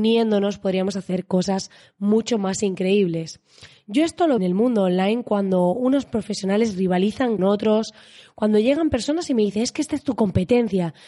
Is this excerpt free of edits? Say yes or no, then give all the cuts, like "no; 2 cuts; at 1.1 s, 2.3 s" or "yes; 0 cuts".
no; 2 cuts; at 4.4 s, 7.4 s